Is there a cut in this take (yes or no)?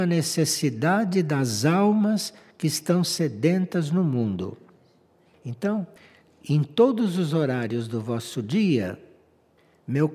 no